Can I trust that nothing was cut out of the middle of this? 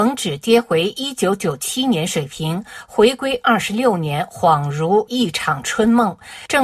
yes; 0 cuts

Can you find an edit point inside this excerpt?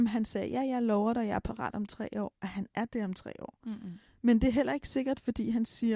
no; 0 cuts

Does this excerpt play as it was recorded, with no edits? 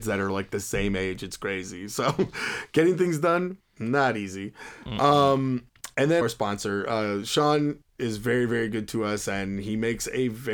no; 1 cut; at 6.2 s

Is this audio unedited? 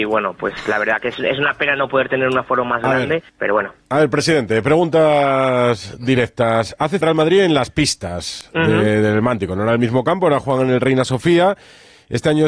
no; 3 cuts; at 3.3 s, 3.8 s, 7.0 s

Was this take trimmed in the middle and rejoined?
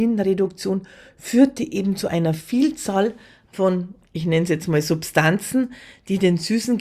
no; 0 cuts

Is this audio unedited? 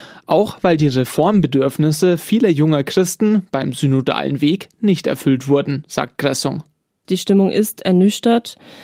yes; 0 cuts

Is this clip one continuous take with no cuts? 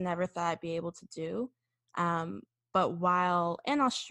yes; 0 cuts

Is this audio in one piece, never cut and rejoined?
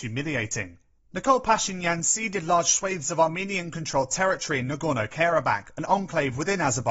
no; 1 cut; at 1.0 s

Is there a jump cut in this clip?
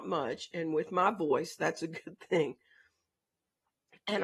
no; 0 cuts

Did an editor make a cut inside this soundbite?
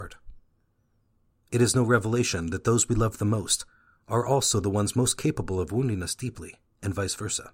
no; 0 cuts

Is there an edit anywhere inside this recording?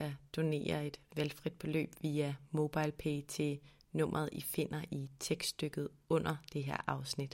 no; 0 cuts

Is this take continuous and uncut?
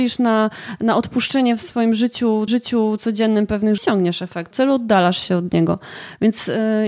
no; 3 cuts; at 2.5 s, 3.8 s, 4.5 s

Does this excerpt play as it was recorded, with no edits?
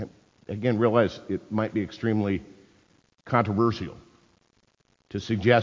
yes; 0 cuts

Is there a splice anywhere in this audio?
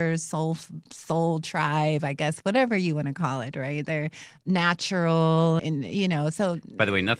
yes; 1 cut; at 5.6 s

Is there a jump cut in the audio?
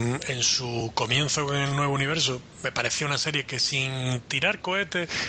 no; 0 cuts

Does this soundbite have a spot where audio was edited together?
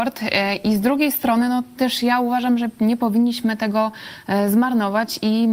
no; 0 cuts

